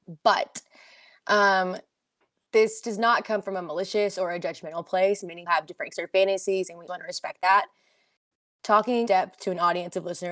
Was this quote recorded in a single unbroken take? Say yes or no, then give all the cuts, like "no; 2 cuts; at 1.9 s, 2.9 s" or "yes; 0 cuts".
no; 4 cuts; at 5.5 s, 5.9 s, 6.9 s, 9.1 s